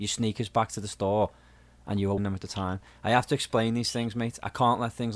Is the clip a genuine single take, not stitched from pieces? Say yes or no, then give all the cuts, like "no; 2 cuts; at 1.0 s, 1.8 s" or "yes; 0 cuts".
no; 1 cut; at 2.2 s